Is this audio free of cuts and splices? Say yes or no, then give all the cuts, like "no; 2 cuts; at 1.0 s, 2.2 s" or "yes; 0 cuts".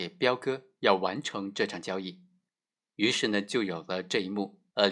yes; 0 cuts